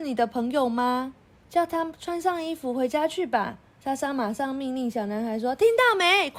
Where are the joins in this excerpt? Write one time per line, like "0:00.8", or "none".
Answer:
0:01.4
0:03.7

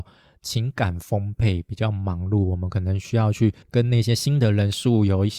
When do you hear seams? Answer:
0:03.6

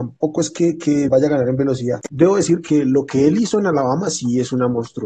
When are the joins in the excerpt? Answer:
0:01.1

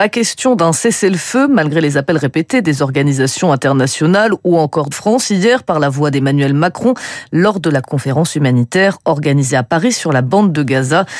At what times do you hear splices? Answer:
0:04.9

